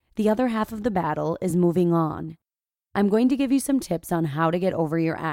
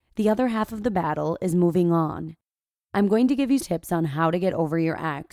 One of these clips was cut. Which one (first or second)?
second